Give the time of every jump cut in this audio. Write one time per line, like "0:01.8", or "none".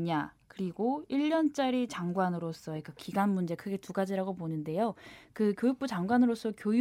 none